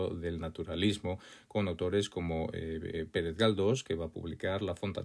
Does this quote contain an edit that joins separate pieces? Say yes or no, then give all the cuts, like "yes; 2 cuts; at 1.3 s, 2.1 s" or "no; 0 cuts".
no; 0 cuts